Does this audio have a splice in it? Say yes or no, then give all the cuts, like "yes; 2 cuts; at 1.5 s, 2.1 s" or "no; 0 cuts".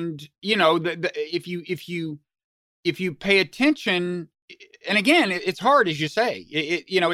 no; 0 cuts